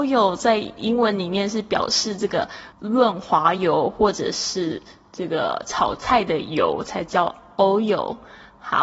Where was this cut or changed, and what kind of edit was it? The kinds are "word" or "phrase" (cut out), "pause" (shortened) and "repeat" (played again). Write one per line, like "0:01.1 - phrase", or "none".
0:02.7 - pause